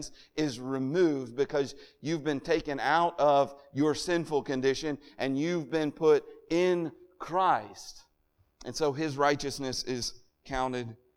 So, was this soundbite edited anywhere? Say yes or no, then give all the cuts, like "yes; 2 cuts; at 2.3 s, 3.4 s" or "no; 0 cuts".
no; 0 cuts